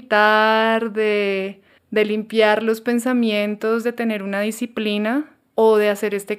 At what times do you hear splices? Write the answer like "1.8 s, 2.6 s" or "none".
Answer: 1.8 s